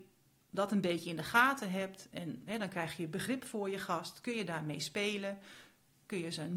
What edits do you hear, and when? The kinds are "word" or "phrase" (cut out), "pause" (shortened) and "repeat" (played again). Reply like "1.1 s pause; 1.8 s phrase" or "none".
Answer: none